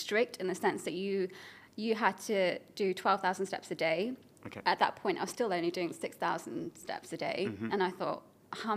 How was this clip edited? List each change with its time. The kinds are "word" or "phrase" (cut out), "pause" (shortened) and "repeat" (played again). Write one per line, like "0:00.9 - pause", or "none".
none

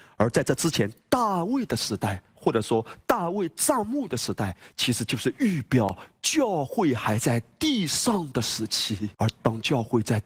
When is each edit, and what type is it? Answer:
0:09.1 - pause

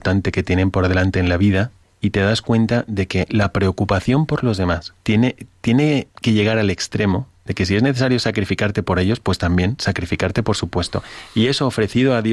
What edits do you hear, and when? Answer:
0:01.8 - pause
0:05.0 - pause
0:06.1 - pause

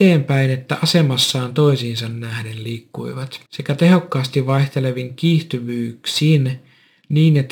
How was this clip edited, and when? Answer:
0:03.5 - pause

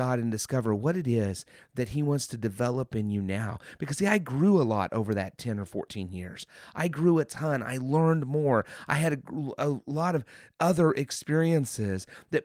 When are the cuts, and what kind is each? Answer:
none

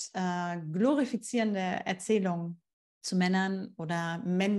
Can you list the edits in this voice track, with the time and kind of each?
0:02.7 - pause

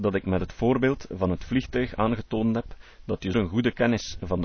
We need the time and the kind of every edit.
0:03.3 - word

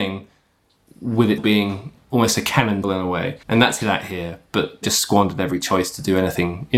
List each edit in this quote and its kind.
0:01.4 - word
0:02.8 - word
0:03.4 - pause
0:03.8 - word
0:04.8 - word

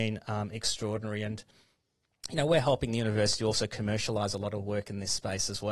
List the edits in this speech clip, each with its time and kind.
none

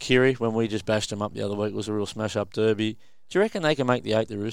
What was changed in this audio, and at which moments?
none

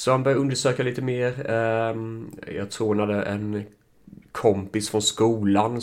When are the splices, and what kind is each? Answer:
none

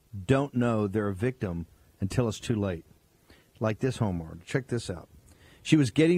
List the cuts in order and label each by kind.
none

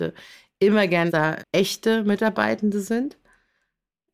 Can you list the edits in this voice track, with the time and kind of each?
0:01.1 - word
0:01.4 - word

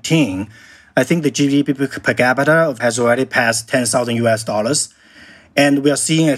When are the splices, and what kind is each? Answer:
0:02.8 - word

